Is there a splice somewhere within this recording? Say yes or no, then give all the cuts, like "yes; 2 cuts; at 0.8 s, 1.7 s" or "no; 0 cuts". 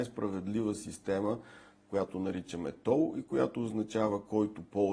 no; 0 cuts